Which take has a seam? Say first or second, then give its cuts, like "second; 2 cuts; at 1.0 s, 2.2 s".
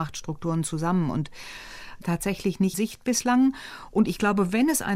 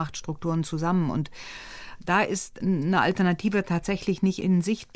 first; 2 cuts; at 2.0 s, 2.7 s